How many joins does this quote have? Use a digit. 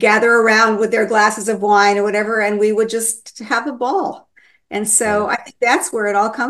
0